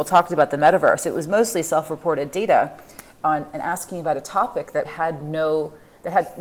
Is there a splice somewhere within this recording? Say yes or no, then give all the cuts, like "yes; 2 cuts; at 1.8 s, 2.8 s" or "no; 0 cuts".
yes; 1 cut; at 4.9 s